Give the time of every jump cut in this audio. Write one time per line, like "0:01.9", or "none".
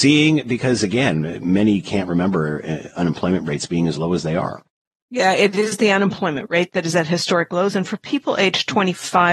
none